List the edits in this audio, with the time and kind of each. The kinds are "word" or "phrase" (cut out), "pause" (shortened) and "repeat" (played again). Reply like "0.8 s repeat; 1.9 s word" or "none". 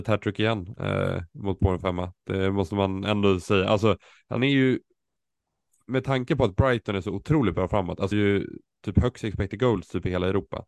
1.3 s pause; 4.4 s word; 8.1 s phrase